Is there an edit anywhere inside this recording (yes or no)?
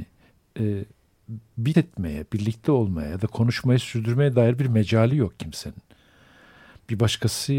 yes